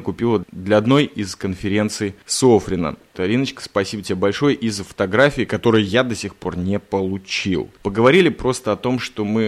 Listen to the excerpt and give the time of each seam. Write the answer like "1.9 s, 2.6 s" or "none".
none